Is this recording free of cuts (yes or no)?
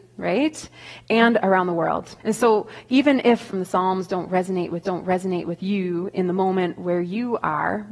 no